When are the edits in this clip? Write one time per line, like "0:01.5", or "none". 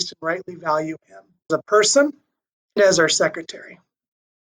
0:01.5
0:02.8